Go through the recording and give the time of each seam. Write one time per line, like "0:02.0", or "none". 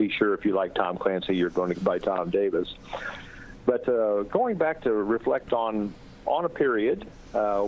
0:01.7
0:03.8